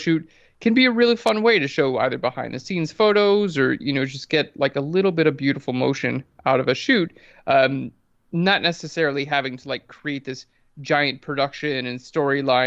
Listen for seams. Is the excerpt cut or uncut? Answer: uncut